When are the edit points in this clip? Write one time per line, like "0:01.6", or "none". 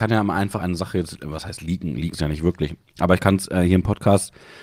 0:02.1